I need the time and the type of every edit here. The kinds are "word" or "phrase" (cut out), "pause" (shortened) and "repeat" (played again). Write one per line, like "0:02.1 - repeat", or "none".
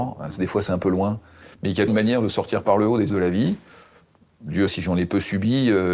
0:01.5 - pause
0:01.9 - word
0:03.1 - word
0:04.7 - word